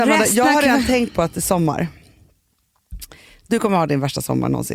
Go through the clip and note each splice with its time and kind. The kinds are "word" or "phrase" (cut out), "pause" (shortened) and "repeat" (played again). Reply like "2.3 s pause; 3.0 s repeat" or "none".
none